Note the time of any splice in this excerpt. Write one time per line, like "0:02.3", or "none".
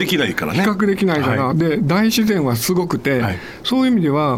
none